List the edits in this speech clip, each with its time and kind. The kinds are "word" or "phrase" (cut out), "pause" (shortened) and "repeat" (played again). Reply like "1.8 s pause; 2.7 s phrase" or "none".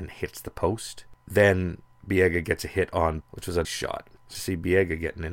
3.2 s word; 3.6 s word; 4.3 s word